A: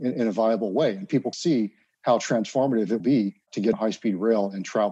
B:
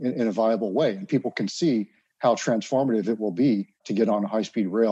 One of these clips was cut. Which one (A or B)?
A